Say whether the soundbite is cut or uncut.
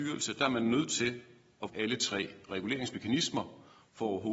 cut